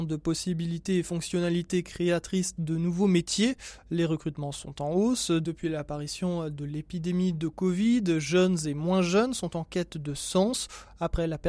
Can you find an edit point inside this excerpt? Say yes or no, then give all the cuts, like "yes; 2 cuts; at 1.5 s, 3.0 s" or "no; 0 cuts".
no; 0 cuts